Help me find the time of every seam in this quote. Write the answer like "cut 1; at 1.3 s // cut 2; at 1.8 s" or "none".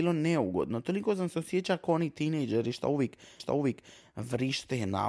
cut 1; at 3.4 s